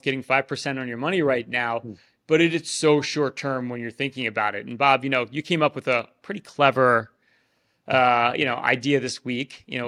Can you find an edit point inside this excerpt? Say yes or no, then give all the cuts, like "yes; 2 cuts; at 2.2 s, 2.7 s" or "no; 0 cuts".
no; 0 cuts